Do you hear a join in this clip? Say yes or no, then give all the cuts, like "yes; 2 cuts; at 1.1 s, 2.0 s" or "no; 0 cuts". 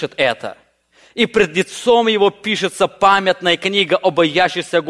no; 0 cuts